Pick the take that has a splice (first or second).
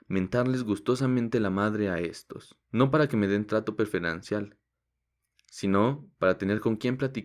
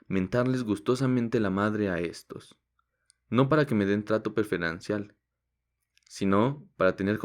first